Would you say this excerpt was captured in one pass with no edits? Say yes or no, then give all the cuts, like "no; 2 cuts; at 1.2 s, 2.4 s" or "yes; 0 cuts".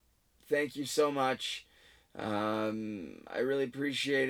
yes; 0 cuts